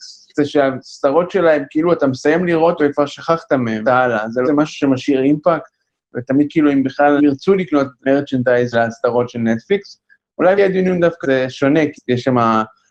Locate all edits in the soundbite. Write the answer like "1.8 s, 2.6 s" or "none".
2.8 s, 3.8 s, 4.4 s, 6.5 s, 7.2 s, 8.7 s, 10.6 s, 11.2 s, 11.9 s